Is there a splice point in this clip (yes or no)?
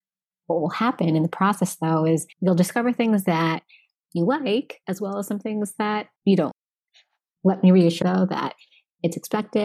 yes